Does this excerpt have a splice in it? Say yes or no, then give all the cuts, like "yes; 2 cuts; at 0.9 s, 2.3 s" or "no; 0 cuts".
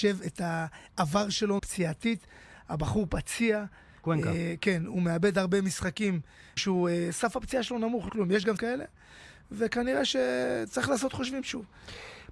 yes; 4 cuts; at 1.6 s, 6.6 s, 8.1 s, 8.6 s